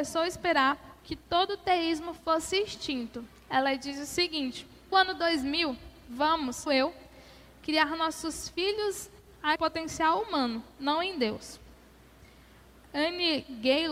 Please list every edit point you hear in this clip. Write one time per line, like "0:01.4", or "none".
0:01.0
0:02.2
0:04.9
0:06.7
0:09.6

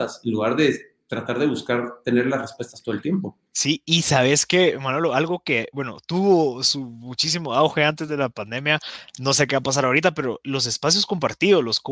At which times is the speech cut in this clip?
none

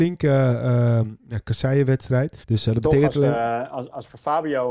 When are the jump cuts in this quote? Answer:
0:02.4

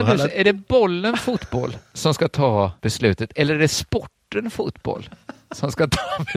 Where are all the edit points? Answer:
0:02.8

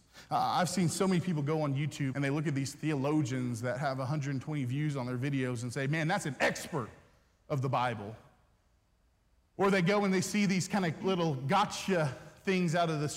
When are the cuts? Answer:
0:02.1
0:11.0

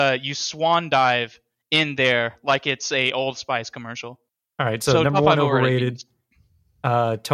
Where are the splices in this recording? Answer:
0:04.3

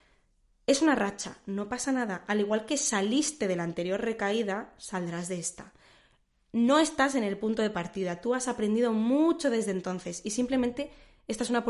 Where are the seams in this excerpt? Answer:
none

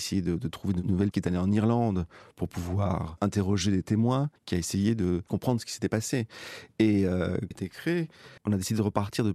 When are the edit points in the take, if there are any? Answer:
0:01.1
0:04.4
0:05.3
0:07.5
0:08.4

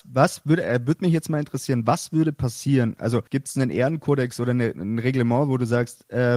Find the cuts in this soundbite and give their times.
0:03.3

